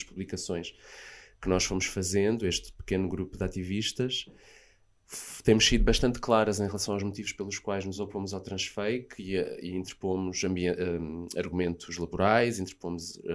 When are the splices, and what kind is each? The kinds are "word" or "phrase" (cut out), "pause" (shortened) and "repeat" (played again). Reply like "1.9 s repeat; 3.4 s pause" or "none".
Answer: none